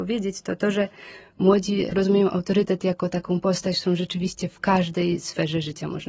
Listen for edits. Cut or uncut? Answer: uncut